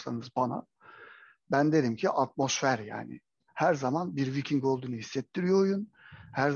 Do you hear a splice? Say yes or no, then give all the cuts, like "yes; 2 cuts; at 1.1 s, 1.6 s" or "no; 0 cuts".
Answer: no; 0 cuts